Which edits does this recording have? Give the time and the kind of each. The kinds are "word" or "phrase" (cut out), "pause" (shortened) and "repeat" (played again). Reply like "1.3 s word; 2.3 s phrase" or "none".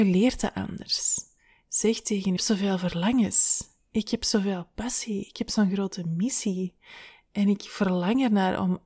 2.4 s phrase